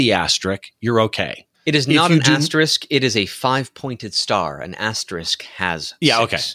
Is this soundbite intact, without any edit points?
no; 1 cut; at 1.5 s

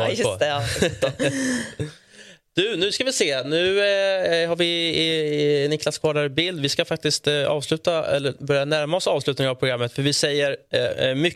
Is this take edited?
no; 0 cuts

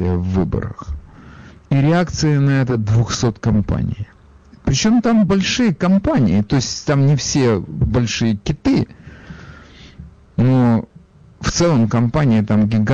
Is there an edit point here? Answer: no; 0 cuts

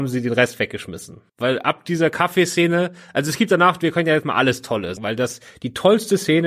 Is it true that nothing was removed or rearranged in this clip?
no; 3 cuts; at 1.3 s, 4.2 s, 5.0 s

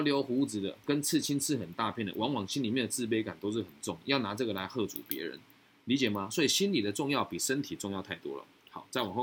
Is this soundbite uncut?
yes; 0 cuts

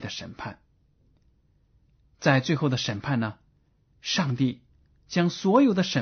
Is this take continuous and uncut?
yes; 0 cuts

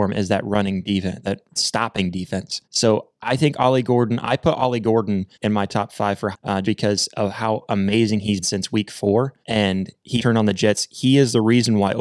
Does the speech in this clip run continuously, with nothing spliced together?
no; 9 cuts; at 1.2 s, 1.6 s, 2.6 s, 5.3 s, 6.3 s, 6.6 s, 8.4 s, 9.4 s, 10.2 s

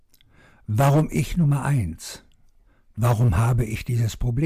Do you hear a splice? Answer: no; 0 cuts

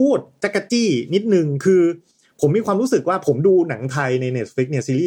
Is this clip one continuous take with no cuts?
yes; 0 cuts

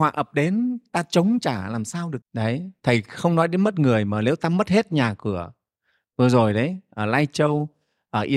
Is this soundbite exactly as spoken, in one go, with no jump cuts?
no; 1 cut; at 2.2 s

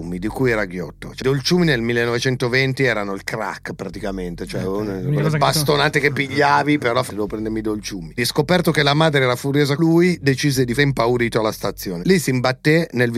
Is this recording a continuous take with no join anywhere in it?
no; 5 cuts; at 1.2 s, 7.1 s, 8.2 s, 9.8 s, 10.8 s

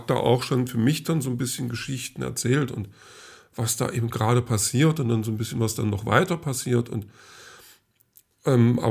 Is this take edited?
no; 0 cuts

